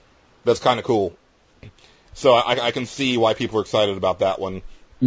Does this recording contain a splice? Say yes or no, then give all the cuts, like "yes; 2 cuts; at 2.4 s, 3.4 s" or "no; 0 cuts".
no; 0 cuts